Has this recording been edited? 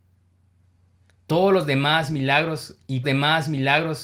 yes; 1 cut; at 3.0 s

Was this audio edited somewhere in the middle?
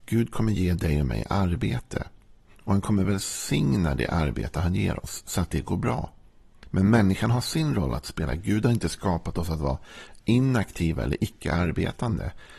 no; 0 cuts

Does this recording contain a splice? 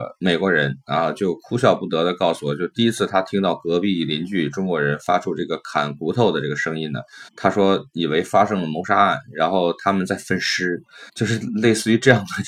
yes; 2 cuts; at 7.3 s, 11.1 s

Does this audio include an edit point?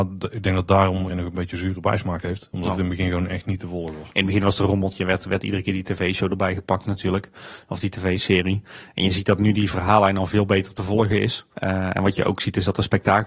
yes; 2 cuts; at 1.1 s, 11.5 s

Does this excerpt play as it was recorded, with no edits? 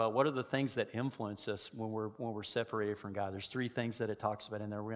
yes; 0 cuts

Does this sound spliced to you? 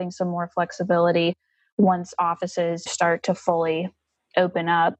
yes; 1 cut; at 2.9 s

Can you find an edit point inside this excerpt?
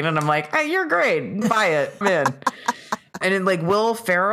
yes; 3 cuts; at 1.4 s, 2.0 s, 3.2 s

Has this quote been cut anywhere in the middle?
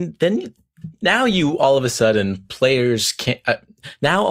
no; 0 cuts

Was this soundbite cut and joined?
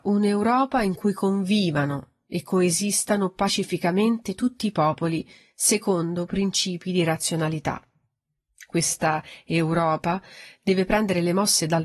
no; 0 cuts

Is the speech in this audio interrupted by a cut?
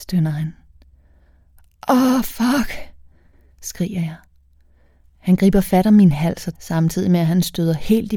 yes; 1 cut; at 6.5 s

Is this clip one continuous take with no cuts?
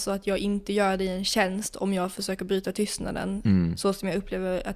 yes; 0 cuts

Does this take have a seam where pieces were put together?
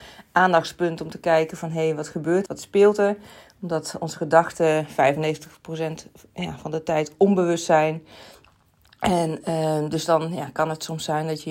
yes; 1 cut; at 2.5 s

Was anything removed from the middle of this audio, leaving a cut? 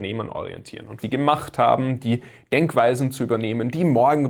yes; 1 cut; at 1.0 s

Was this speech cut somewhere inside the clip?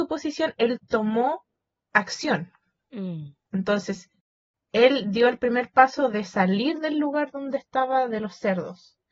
no; 0 cuts

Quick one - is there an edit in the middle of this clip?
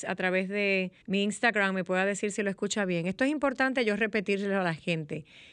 yes; 1 cut; at 1.0 s

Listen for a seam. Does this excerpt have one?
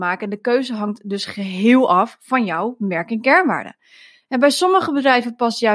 no; 0 cuts

